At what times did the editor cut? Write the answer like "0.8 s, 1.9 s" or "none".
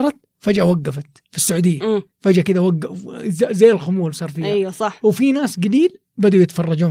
1.2 s, 2.1 s